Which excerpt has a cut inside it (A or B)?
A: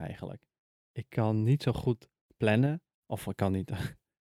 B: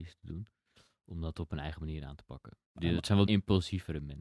B